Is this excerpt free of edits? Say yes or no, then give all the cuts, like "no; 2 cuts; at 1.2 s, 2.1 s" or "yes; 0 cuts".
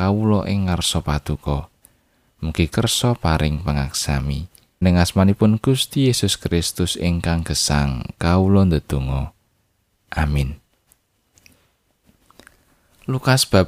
no; 2 cuts; at 2.7 s, 4.8 s